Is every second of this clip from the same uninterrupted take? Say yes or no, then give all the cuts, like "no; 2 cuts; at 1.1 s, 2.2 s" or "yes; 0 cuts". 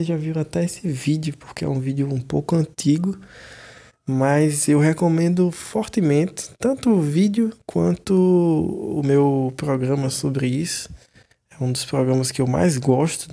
yes; 0 cuts